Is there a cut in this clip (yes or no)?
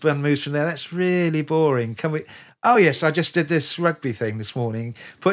no